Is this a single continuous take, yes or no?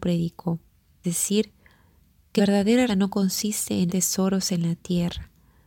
no